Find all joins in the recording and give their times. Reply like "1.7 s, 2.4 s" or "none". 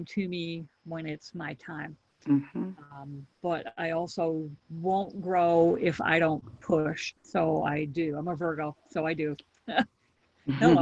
3.3 s, 7.2 s